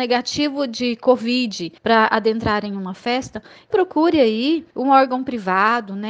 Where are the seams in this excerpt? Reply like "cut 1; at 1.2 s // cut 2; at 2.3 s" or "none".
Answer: cut 1; at 1.8 s // cut 2; at 3.7 s // cut 3; at 4.7 s